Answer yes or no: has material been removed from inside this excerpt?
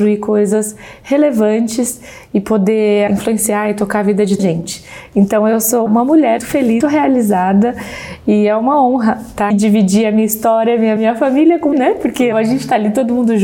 yes